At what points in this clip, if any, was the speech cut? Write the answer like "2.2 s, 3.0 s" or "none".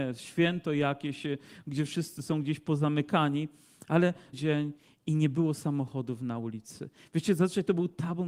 4.3 s